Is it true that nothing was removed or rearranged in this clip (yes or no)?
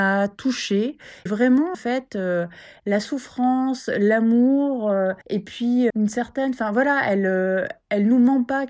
no